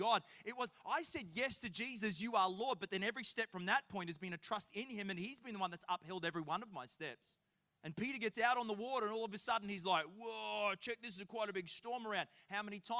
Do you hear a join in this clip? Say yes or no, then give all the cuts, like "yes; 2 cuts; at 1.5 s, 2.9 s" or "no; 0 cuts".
yes; 1 cut; at 7.5 s